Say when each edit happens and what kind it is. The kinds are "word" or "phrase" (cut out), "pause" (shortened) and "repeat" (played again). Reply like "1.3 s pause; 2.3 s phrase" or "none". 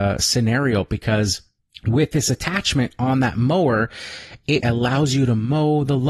1.6 s pause; 4.6 s word